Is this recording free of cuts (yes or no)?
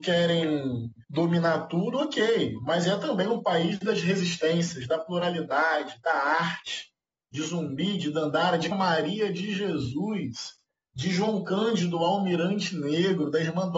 no